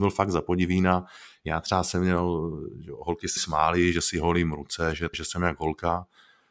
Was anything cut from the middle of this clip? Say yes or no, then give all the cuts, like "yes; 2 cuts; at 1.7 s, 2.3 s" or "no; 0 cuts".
yes; 2 cuts; at 3.4 s, 5.1 s